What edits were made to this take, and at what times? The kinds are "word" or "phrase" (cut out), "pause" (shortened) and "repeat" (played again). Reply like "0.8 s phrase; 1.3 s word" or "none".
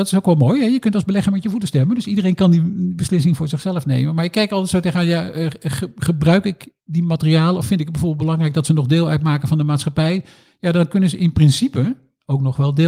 6.8 s pause